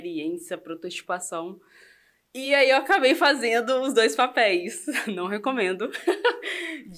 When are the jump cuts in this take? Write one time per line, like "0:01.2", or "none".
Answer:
none

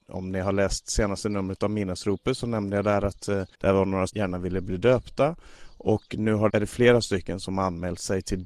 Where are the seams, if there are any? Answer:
0:03.5
0:04.1
0:06.5

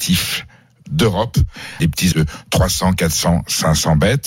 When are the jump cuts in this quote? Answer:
0:01.8
0:02.1

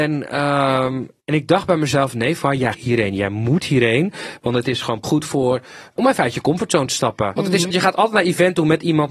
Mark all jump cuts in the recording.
0:01.2
0:02.7
0:05.0
0:06.0
0:07.4
0:07.7

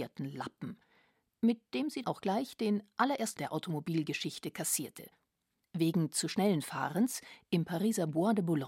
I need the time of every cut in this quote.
0:02.0
0:03.4

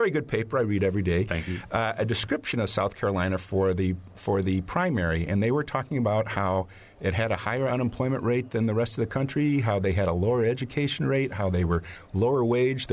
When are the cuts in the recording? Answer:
none

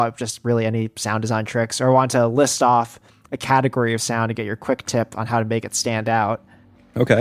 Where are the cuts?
none

